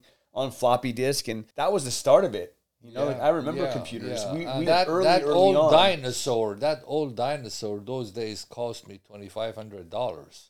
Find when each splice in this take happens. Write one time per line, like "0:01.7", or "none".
0:01.5
0:04.7